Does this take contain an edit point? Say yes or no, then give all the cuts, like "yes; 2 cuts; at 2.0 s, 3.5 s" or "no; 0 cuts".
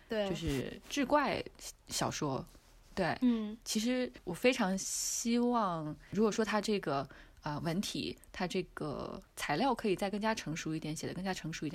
no; 0 cuts